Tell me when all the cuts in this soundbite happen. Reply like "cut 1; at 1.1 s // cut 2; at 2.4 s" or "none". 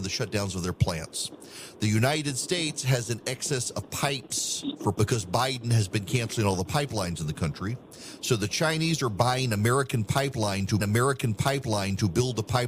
cut 1; at 4.9 s // cut 2; at 10.8 s

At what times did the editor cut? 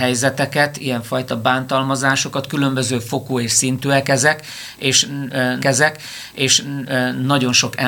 cut 1; at 5.6 s

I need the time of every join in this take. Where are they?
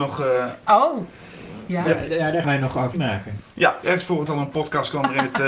cut 1; at 2.4 s // cut 2; at 2.9 s // cut 3; at 3.8 s // cut 4; at 4.3 s

